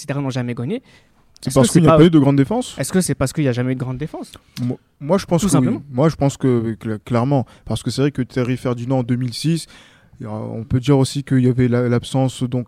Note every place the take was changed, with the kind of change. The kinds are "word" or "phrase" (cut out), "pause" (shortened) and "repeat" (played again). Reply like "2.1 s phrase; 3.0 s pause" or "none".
none